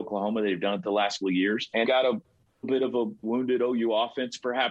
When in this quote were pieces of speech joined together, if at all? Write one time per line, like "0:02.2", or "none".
0:01.2
0:01.8
0:02.6
0:03.2